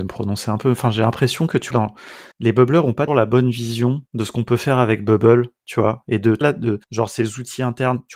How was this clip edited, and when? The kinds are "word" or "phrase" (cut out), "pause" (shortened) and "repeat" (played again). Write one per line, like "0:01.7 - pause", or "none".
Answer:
0:01.7 - word
0:02.3 - pause
0:03.1 - word
0:04.1 - pause
0:06.4 - word
0:06.8 - pause